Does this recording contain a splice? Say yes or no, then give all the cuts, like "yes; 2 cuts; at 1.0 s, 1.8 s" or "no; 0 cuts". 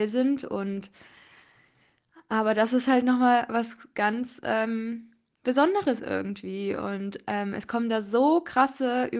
no; 0 cuts